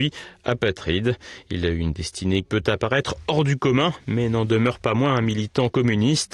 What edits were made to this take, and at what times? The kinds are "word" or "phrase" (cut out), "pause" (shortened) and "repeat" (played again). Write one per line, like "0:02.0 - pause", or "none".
0:02.4 - word